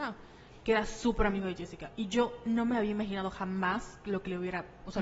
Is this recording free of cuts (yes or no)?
yes